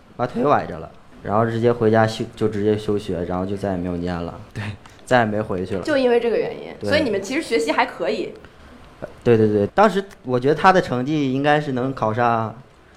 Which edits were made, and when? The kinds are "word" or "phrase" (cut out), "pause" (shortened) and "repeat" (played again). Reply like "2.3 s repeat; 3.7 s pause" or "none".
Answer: 4.5 s pause; 9.2 s pause